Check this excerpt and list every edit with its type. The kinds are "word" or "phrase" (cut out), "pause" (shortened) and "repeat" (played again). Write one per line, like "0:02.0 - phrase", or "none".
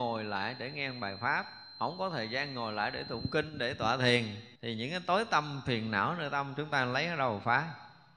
0:04.5 - pause